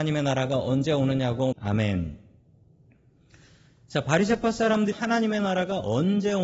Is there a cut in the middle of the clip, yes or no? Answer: yes